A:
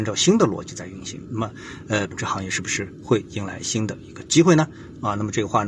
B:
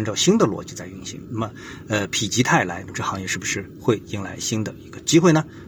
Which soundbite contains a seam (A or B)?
A